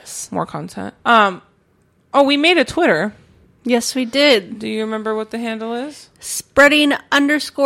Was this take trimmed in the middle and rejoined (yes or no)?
yes